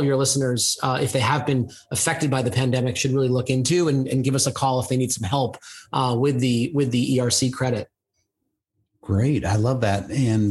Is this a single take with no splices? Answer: yes; 0 cuts

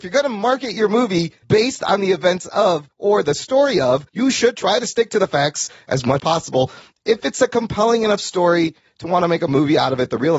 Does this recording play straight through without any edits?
no; 4 cuts; at 1.4 s, 2.9 s, 4.1 s, 6.2 s

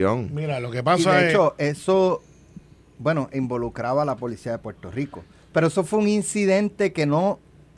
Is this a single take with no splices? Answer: yes; 0 cuts

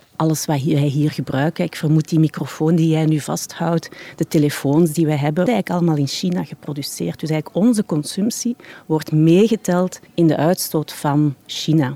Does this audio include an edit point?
yes; 1 cut; at 5.5 s

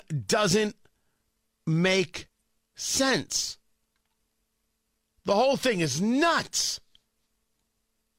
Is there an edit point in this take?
no; 0 cuts

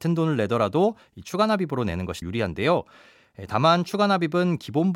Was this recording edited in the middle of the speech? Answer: yes; 1 cut; at 2.2 s

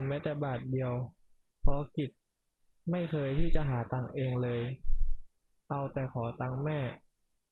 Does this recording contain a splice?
no; 0 cuts

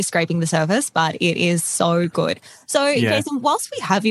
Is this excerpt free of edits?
yes; 0 cuts

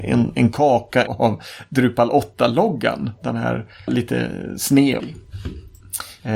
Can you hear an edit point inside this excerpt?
yes; 3 cuts; at 1.1 s, 3.9 s, 5.0 s

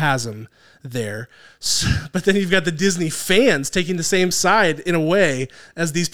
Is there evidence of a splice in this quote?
no; 0 cuts

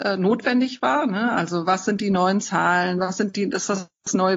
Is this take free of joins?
yes; 0 cuts

